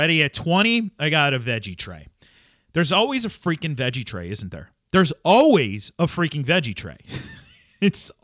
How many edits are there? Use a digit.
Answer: 0